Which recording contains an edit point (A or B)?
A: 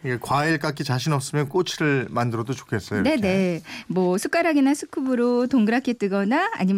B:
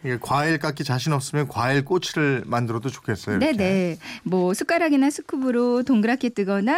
A